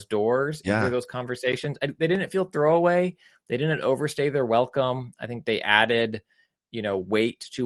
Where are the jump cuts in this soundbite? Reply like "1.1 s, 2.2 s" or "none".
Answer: none